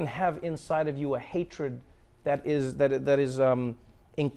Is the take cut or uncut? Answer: uncut